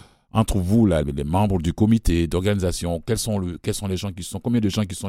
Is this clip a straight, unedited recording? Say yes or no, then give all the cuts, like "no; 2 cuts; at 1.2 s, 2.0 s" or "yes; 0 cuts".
no; 1 cut; at 1.0 s